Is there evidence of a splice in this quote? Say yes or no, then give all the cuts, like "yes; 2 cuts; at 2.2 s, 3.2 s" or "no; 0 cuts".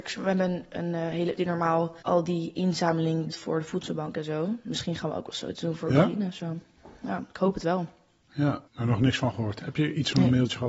yes; 4 cuts; at 1.4 s, 2.0 s, 3.3 s, 8.7 s